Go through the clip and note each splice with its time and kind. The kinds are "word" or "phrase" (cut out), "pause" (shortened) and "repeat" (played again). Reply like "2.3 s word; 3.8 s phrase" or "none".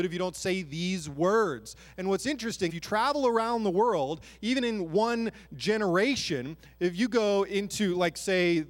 2.7 s phrase